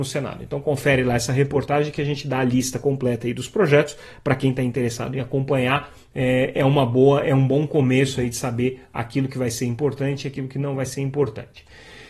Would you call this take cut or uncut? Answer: uncut